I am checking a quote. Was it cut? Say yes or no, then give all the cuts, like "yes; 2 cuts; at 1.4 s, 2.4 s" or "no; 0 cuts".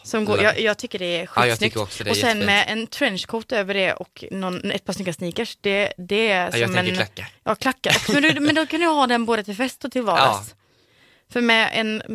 yes; 1 cut; at 7.4 s